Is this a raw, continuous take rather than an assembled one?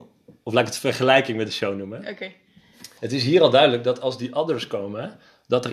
no; 1 cut; at 3.0 s

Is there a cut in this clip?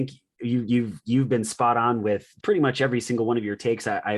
yes; 1 cut; at 2.4 s

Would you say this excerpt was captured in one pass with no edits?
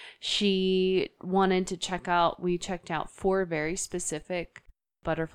yes; 0 cuts

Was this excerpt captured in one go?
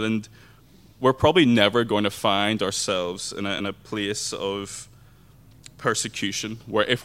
yes; 0 cuts

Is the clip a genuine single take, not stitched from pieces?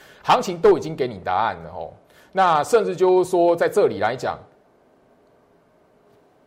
yes; 0 cuts

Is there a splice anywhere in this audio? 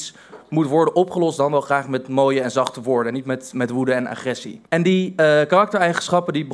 yes; 1 cut; at 4.7 s

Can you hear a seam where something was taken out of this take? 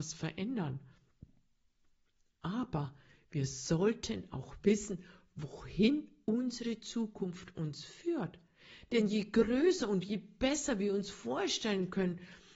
no; 0 cuts

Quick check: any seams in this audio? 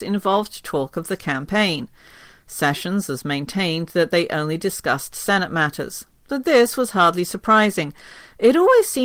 no; 0 cuts

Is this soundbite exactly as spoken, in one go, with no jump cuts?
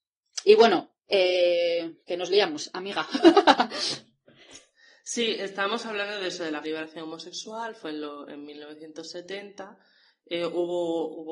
no; 2 cuts; at 2.0 s, 6.6 s

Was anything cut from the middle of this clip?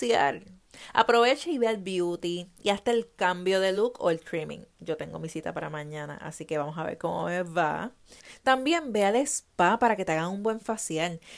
no; 0 cuts

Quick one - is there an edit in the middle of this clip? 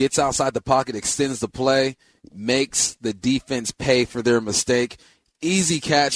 no; 0 cuts

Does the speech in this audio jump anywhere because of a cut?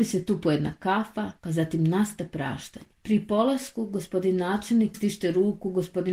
yes; 3 cuts; at 1.4 s, 2.9 s, 4.9 s

